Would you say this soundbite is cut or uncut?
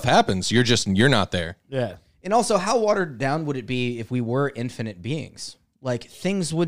uncut